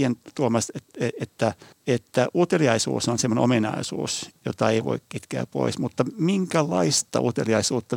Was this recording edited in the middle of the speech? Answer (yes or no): yes